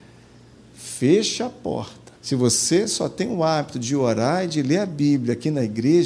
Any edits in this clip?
yes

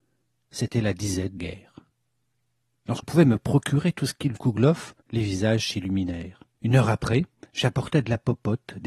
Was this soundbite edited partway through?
yes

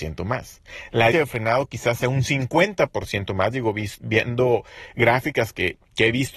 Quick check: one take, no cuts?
no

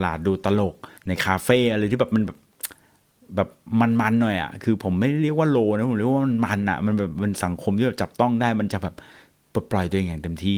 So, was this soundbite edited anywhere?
yes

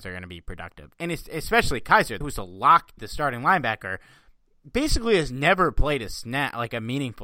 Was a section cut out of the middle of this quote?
yes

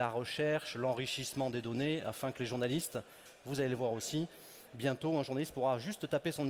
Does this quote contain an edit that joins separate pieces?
no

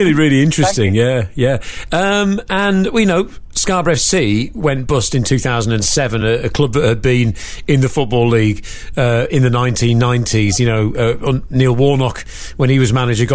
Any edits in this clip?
no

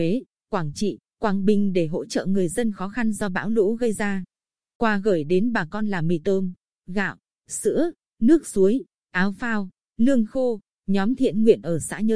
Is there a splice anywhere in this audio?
no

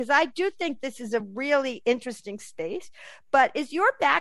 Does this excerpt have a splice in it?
no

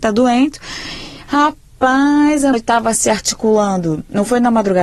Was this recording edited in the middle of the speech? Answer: yes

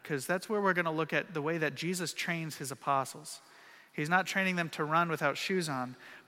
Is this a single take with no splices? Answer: yes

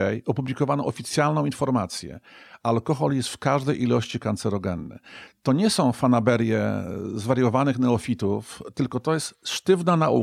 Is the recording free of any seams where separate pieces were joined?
yes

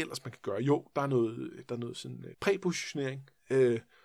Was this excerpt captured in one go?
no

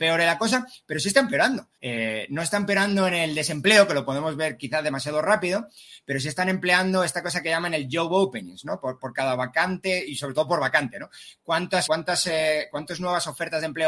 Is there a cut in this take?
yes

